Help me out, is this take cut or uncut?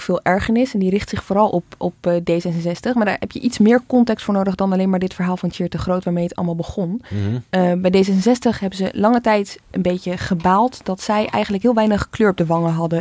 uncut